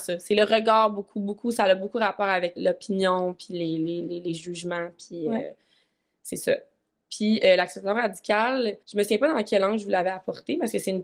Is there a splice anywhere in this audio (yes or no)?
yes